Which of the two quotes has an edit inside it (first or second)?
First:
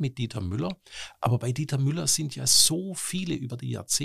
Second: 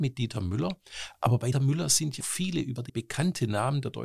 second